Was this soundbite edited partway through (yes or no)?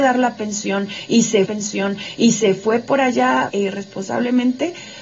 yes